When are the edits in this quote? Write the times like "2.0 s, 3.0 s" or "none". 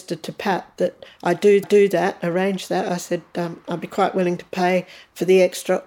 1.6 s